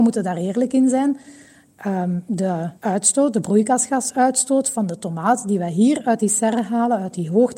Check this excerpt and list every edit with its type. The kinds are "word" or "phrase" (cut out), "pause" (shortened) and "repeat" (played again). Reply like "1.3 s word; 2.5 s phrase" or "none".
2.8 s pause